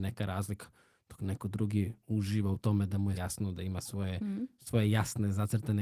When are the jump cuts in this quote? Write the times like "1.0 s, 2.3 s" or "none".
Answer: 3.2 s